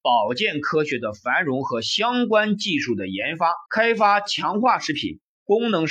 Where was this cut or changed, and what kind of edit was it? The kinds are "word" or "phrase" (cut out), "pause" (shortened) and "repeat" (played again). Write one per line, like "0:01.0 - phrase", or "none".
0:03.7 - pause